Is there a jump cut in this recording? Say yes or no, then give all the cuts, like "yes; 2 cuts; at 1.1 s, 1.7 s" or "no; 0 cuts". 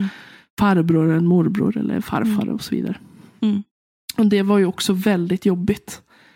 no; 0 cuts